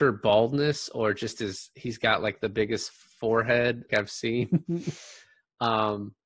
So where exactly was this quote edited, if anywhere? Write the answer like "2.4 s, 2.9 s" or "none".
3.9 s